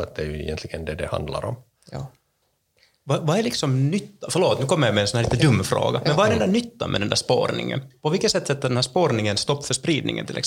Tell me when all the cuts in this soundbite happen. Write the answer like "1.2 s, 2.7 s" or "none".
none